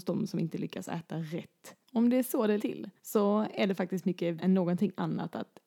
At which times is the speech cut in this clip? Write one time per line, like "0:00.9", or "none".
0:01.8
0:02.6
0:03.0
0:04.4